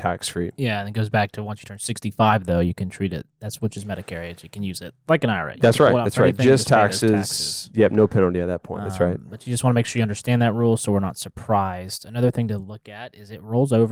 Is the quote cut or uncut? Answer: uncut